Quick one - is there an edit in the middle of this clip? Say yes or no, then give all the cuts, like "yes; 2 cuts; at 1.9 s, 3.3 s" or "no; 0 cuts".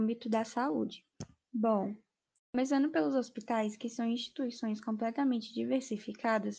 no; 0 cuts